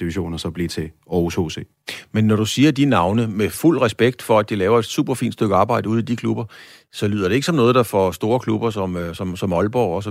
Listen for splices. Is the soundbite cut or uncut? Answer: uncut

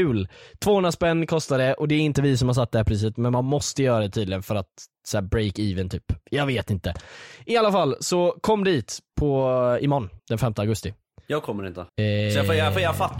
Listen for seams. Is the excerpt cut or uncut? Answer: cut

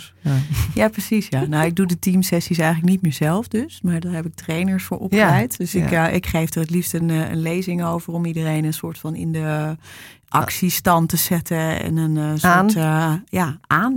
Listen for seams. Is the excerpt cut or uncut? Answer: uncut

